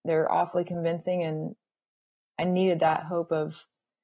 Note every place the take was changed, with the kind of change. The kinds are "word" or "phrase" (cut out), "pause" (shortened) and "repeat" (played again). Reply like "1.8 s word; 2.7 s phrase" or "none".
none